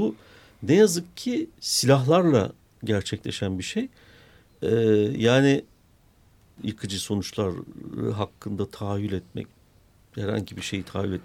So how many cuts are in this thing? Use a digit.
1